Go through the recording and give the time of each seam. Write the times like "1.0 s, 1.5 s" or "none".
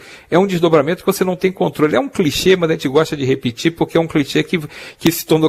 none